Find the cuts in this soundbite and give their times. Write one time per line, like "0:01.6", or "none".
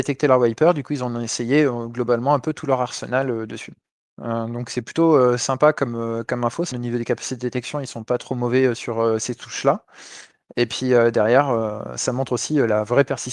0:03.8
0:06.7